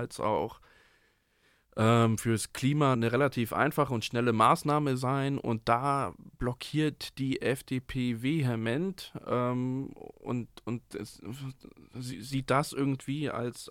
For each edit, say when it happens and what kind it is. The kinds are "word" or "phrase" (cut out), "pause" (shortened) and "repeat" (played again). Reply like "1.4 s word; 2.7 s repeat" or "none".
2.9 s word; 10.1 s pause

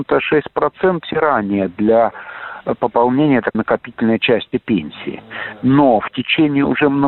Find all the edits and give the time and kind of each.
1.0 s word; 3.5 s word

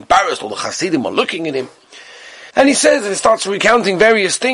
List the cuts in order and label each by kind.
2.5 s pause

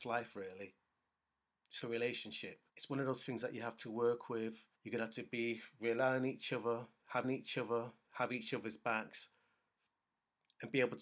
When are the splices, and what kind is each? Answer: 1.8 s word; 2.7 s pause; 4.8 s pause; 7.2 s repeat

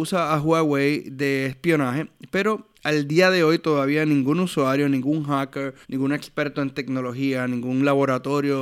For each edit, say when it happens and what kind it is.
2.7 s pause; 5.8 s pause

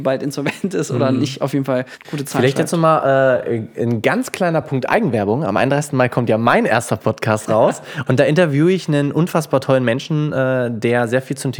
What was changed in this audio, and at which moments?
none

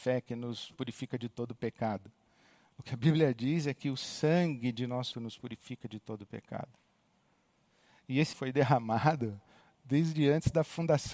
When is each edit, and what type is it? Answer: 5.1 s phrase; 8.3 s word

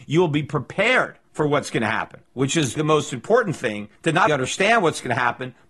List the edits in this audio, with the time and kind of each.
1.2 s pause; 2.8 s word; 4.0 s pause; 4.3 s word

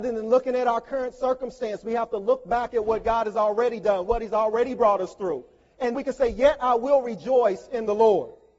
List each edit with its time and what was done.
5.9 s word

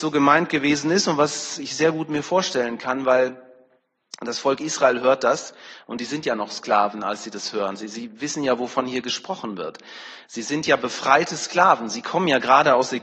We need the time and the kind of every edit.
none

